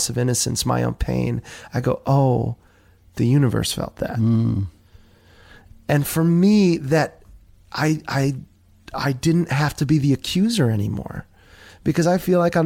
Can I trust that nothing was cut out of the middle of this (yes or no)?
yes